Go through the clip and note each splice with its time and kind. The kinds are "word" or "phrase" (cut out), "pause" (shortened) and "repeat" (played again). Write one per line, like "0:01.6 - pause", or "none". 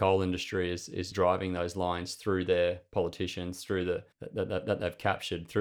0:01.1 - word
0:04.1 - pause